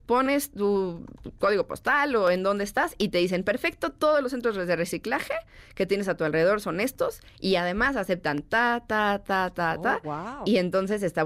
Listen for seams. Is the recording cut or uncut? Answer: uncut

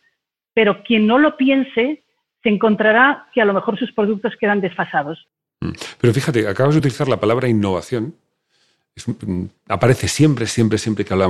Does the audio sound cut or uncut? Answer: uncut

